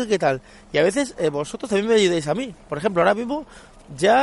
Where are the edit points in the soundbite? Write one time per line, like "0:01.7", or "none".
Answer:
none